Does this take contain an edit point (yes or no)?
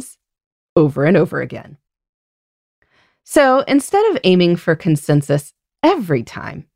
no